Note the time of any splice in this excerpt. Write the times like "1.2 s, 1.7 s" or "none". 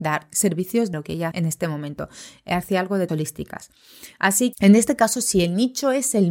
0.9 s, 1.3 s, 3.1 s, 4.5 s